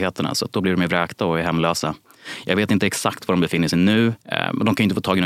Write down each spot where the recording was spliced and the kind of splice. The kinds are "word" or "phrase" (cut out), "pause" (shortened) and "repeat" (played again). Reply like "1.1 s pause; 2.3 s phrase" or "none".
4.2 s pause